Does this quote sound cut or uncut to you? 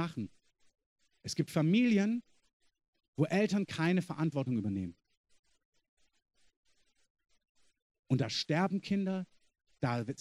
uncut